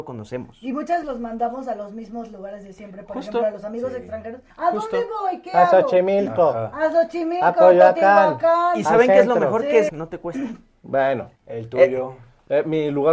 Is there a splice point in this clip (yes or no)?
yes